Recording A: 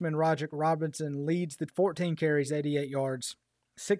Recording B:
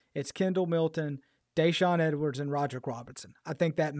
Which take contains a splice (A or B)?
A